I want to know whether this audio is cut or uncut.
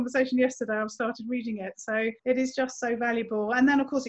cut